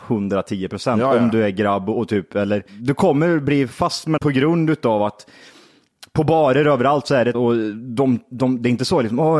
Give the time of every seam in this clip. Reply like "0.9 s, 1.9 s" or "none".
2.7 s, 4.2 s, 7.3 s